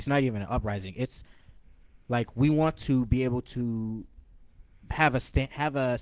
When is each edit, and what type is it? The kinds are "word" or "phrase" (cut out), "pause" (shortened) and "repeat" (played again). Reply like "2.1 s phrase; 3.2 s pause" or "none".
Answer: none